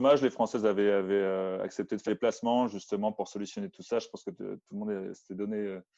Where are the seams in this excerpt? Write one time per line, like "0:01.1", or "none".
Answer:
0:02.1